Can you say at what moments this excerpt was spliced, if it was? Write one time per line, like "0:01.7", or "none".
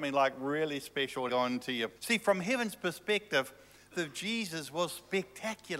0:01.3
0:02.0
0:03.9